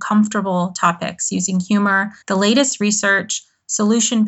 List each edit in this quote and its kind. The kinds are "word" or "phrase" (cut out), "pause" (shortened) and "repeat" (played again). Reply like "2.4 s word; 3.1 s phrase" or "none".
2.2 s pause